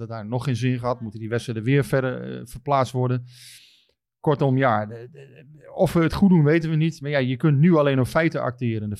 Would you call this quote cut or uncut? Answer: uncut